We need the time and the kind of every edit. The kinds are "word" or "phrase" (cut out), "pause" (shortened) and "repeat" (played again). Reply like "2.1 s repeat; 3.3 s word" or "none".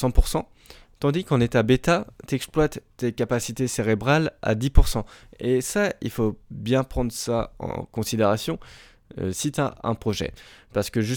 none